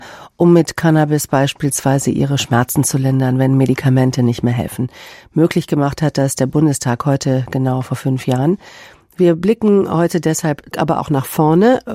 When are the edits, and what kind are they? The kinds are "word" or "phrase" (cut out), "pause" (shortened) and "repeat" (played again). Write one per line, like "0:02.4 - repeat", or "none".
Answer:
0:10.7 - word